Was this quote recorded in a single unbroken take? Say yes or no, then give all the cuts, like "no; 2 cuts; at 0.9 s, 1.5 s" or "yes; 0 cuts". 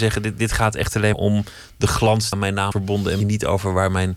no; 4 cuts; at 1.1 s, 2.3 s, 2.7 s, 3.2 s